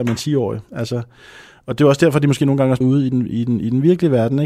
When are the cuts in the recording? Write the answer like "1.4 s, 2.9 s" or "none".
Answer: 2.8 s